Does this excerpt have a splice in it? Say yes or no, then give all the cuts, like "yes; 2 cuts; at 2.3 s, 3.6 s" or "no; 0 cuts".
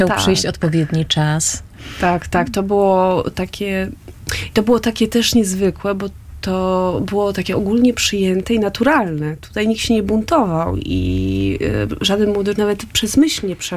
yes; 1 cut; at 12.6 s